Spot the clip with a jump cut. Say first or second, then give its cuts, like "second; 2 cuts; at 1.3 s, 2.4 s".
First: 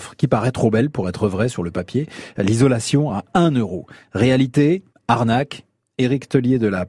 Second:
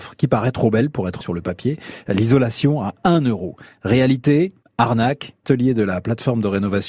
second; 2 cuts; at 1.2 s, 5.4 s